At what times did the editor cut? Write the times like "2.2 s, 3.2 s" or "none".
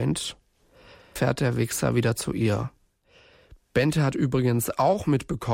1.2 s